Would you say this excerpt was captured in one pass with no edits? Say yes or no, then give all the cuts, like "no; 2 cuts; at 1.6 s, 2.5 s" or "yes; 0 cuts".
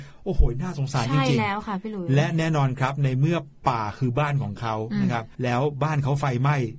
no; 1 cut; at 5.3 s